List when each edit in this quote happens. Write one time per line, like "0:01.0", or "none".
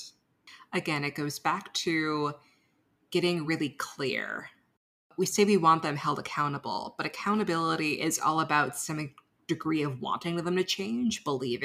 none